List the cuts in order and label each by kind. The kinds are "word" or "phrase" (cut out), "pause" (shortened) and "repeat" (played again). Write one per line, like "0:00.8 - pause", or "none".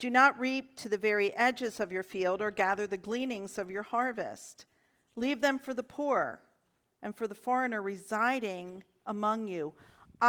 none